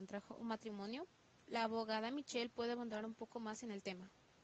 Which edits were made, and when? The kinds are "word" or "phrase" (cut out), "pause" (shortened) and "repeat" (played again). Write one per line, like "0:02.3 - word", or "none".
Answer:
0:01.4 - word